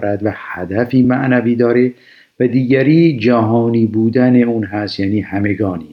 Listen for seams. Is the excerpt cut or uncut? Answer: uncut